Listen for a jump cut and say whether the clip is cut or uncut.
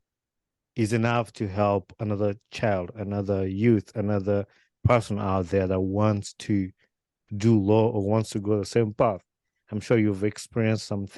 uncut